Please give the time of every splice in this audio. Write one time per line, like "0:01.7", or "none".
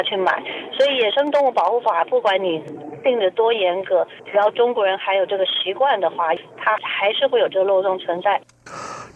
0:04.2